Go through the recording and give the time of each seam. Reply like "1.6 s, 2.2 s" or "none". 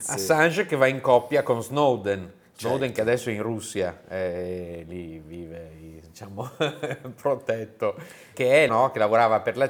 8.3 s, 8.7 s